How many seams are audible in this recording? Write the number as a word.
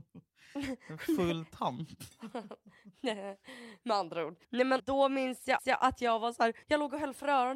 four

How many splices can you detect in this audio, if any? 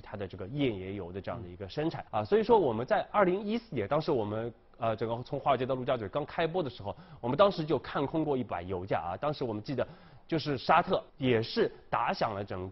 two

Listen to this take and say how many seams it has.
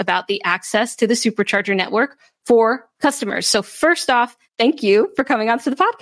two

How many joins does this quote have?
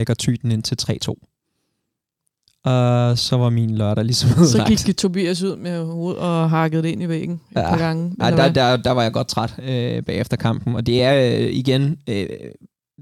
zero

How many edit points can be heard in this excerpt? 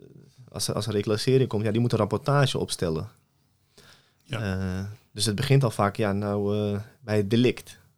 zero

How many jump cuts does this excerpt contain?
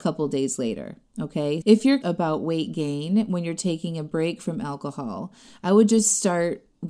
two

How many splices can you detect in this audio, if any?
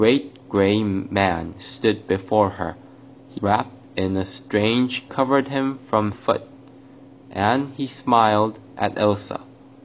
three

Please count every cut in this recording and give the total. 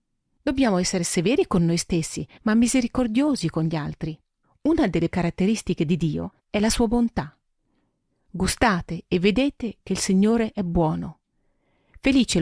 three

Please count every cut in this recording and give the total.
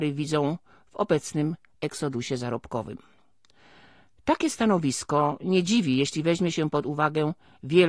zero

